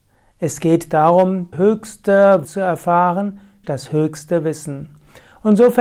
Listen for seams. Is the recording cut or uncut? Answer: cut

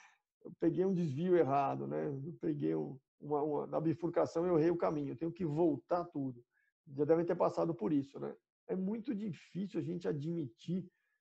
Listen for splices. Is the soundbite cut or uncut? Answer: cut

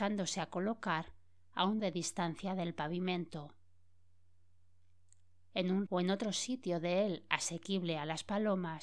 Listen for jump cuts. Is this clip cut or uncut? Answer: cut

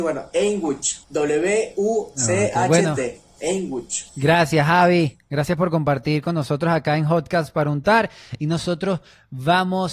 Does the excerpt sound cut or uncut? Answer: cut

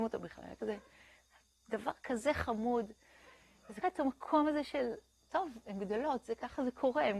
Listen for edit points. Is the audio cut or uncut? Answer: cut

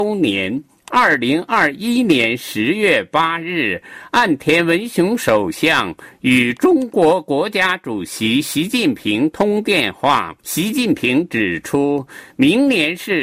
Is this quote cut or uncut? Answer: cut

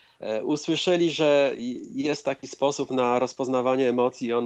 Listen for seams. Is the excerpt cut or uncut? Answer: uncut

